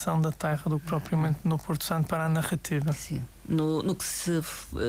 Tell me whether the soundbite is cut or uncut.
uncut